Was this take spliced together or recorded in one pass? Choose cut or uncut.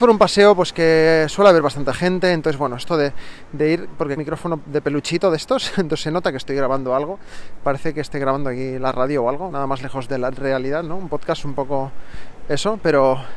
cut